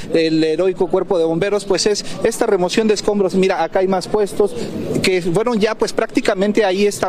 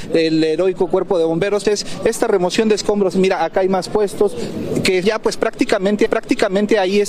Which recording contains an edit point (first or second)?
second